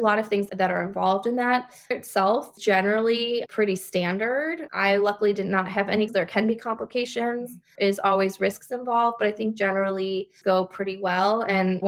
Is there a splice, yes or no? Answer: yes